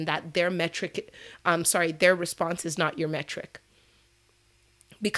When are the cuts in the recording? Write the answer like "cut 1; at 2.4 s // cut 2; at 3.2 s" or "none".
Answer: none